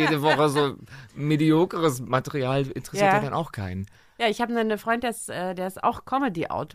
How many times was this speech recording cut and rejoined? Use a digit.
0